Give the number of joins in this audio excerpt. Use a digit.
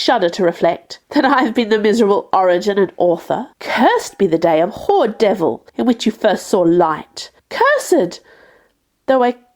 4